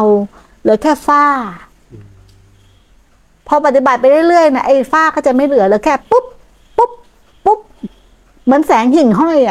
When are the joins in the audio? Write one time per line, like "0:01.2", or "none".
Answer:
none